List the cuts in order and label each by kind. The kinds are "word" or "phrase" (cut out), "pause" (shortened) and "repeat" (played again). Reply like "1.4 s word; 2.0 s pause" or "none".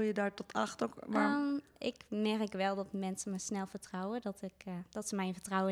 none